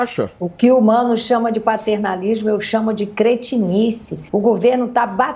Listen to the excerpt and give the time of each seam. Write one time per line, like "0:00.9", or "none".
0:04.3